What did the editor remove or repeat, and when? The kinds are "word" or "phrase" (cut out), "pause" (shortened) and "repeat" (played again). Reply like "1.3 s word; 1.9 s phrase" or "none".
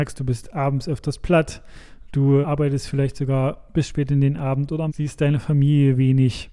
2.4 s word; 4.9 s word